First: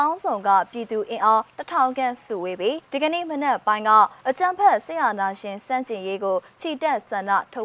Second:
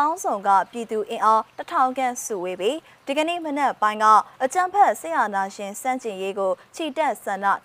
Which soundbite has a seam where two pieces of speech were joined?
first; 1 cut; at 2.8 s

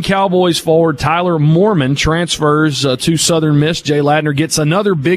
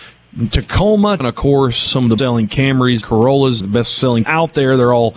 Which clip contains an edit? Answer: second; 6 cuts; at 1.2 s, 1.9 s, 2.2 s, 3.0 s, 3.6 s, 4.2 s

